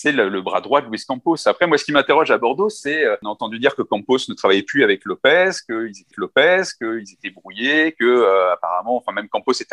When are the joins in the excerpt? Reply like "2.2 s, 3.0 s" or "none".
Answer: 6.1 s